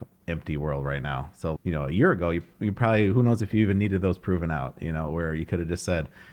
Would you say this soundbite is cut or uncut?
cut